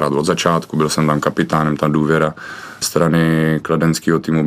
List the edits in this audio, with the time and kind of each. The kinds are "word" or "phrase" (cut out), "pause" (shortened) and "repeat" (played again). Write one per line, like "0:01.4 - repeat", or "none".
0:02.8 - word